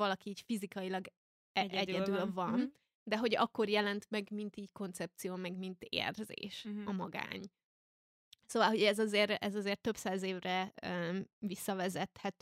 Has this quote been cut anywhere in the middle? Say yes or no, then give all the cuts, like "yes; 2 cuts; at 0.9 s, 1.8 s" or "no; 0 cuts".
no; 0 cuts